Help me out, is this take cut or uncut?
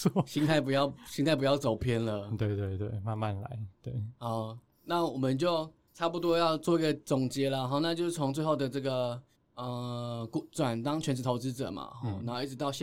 cut